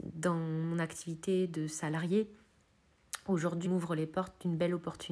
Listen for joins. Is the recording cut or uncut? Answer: cut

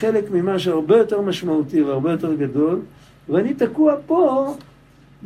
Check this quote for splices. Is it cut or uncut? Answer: uncut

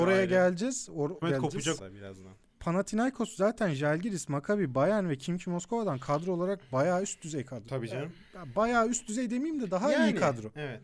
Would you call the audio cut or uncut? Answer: cut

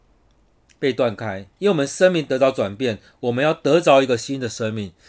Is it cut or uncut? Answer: cut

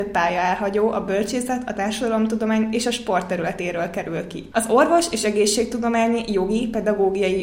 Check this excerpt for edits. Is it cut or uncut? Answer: uncut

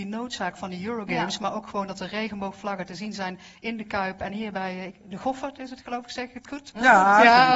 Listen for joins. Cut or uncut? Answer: uncut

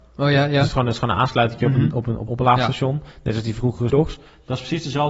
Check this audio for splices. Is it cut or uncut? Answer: cut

